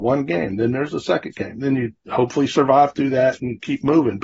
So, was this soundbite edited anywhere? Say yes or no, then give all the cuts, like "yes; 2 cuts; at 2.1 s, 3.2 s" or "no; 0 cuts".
yes; 1 cut; at 2.0 s